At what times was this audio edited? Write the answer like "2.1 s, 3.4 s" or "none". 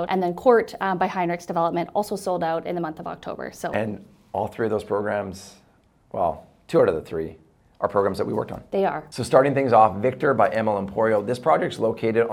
none